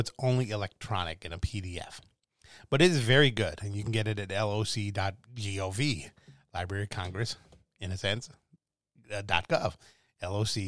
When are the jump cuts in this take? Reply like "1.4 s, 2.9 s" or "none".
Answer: none